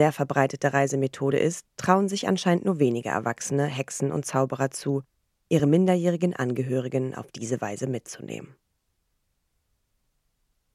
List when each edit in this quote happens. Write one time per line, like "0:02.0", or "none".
none